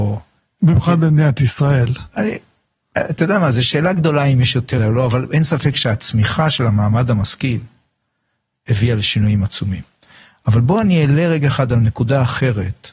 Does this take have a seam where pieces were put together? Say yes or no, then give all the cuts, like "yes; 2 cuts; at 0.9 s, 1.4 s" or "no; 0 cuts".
yes; 1 cut; at 4.8 s